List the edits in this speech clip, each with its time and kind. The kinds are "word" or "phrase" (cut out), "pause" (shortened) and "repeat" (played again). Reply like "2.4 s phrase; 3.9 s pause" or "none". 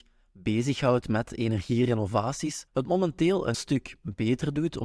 2.7 s pause; 3.5 s word